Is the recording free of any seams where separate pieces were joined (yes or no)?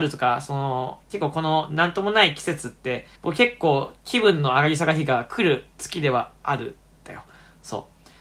no